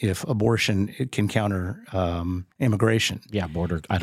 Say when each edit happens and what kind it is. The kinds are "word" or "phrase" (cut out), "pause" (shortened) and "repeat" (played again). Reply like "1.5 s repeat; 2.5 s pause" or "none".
2.5 s pause